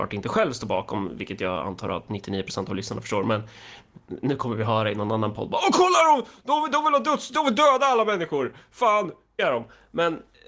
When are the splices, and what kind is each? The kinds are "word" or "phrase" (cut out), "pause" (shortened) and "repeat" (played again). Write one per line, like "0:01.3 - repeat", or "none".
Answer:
0:09.4 - word